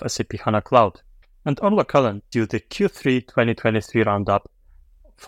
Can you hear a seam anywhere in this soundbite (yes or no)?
yes